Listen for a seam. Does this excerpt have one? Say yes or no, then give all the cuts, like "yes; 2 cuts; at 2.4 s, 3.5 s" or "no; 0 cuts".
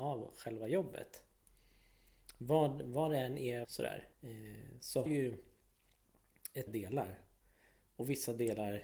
yes; 4 cuts; at 3.6 s, 4.1 s, 5.1 s, 6.7 s